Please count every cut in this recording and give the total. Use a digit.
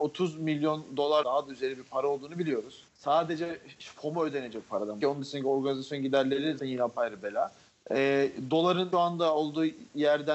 6